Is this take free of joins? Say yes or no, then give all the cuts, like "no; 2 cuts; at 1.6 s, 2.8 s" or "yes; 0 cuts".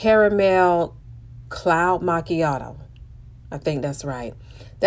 no; 1 cut; at 3.4 s